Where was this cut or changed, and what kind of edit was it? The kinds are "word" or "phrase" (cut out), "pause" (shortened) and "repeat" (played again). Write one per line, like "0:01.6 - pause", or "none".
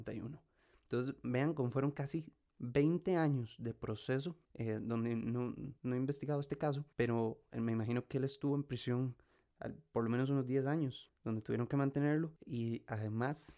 0:04.4 - pause
0:05.8 - pause
0:06.9 - pause
0:12.4 - pause